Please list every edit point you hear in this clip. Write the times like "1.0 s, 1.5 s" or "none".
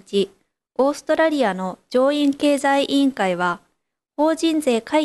none

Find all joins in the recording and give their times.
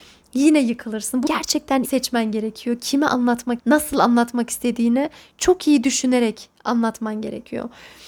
1.3 s, 1.8 s, 3.6 s

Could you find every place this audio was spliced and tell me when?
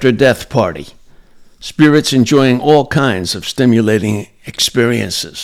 none

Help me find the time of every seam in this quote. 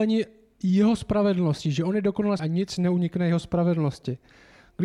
2.4 s

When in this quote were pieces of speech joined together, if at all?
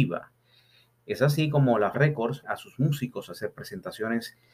1.9 s, 2.4 s

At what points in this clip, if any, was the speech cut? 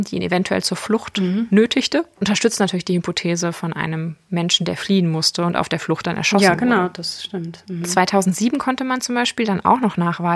none

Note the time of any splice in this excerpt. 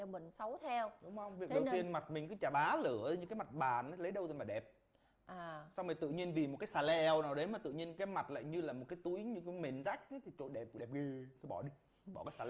none

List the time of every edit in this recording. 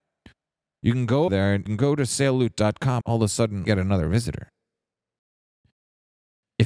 1.3 s, 1.7 s, 3.0 s, 3.6 s

